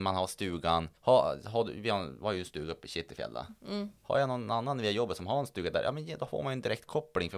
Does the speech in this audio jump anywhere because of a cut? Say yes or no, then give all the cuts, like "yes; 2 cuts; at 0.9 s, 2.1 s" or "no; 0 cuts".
yes; 1 cut; at 1.0 s